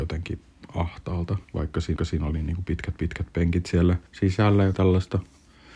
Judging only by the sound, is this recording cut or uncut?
cut